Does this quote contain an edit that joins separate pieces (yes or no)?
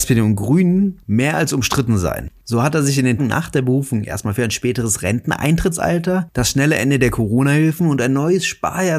yes